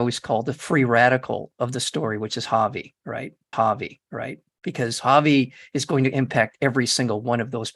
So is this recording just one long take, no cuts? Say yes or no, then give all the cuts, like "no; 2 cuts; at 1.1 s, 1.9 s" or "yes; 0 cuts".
no; 1 cut; at 3.5 s